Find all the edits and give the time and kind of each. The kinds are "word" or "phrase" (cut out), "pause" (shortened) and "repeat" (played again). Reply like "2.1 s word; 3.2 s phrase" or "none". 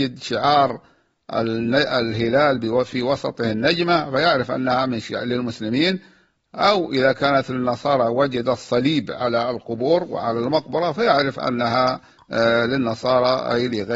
none